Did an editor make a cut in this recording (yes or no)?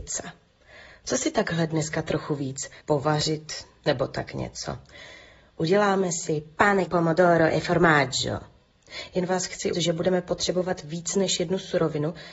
yes